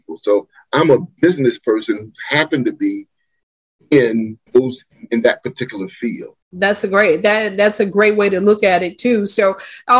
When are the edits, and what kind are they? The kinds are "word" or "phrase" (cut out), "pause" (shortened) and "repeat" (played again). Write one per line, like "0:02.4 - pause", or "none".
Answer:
0:04.5 - pause
0:06.4 - pause